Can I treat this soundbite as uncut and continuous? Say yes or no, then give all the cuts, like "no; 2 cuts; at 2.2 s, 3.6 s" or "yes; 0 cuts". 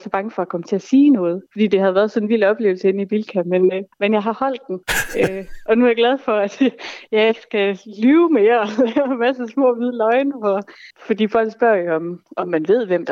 no; 4 cuts; at 1.5 s, 3.9 s, 4.8 s, 10.9 s